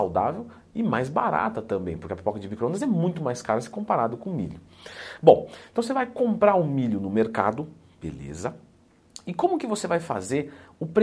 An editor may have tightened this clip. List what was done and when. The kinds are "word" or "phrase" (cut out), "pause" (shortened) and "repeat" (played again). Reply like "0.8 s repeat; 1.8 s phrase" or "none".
none